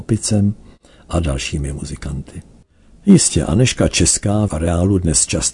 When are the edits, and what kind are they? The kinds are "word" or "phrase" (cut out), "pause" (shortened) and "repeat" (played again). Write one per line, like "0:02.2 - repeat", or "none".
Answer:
0:04.5 - word